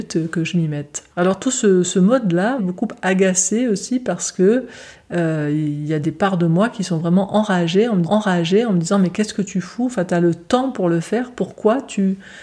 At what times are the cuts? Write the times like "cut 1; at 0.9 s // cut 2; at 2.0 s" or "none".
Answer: cut 1; at 1.1 s // cut 2; at 2.6 s // cut 3; at 8.0 s